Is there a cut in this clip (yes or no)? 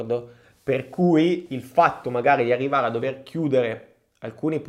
no